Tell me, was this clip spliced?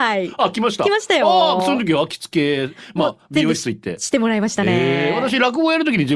no; 0 cuts

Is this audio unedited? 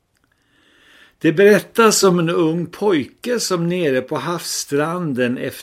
yes; 0 cuts

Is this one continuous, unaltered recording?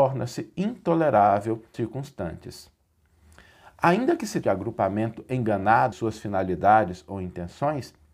no; 3 cuts; at 1.7 s, 4.4 s, 5.9 s

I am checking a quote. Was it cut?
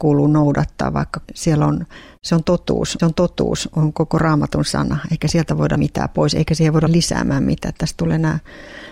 yes; 4 cuts; at 1.2 s, 3.0 s, 5.8 s, 6.9 s

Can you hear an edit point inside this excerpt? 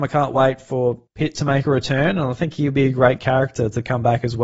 yes; 1 cut; at 1.1 s

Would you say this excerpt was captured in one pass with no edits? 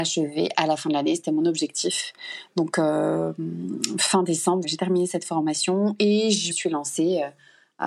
no; 2 cuts; at 4.6 s, 6.5 s

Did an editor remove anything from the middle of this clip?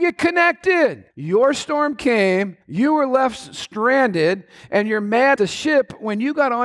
yes; 3 cuts; at 1.1 s, 2.6 s, 5.4 s

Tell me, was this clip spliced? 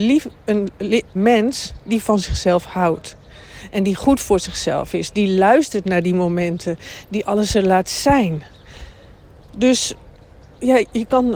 yes; 1 cut; at 1.2 s

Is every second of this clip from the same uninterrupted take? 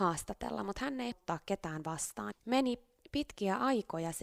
no; 2 cuts; at 1.1 s, 2.3 s

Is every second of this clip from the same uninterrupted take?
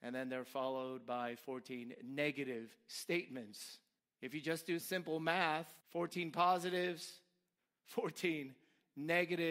no; 3 cuts; at 4.0 s, 4.8 s, 5.8 s

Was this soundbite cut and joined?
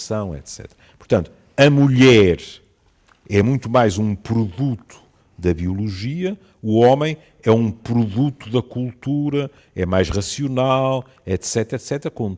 no; 0 cuts

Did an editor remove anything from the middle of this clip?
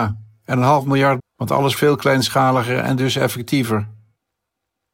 yes; 2 cuts; at 1.2 s, 1.8 s

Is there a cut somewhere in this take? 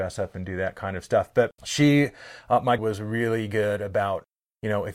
yes; 2 cuts; at 1.5 s, 2.8 s

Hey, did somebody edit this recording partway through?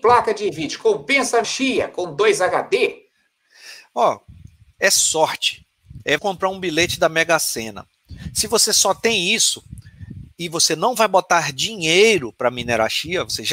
yes; 2 cuts; at 1.4 s, 6.2 s

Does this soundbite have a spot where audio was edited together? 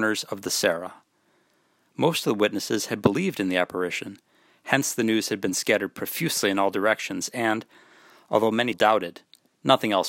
yes; 1 cut; at 8.7 s

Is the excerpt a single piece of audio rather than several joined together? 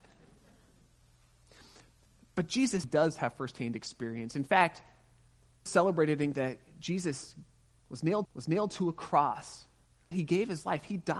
no; 5 cuts; at 2.8 s, 5.7 s, 6.3 s, 8.2 s, 10.1 s

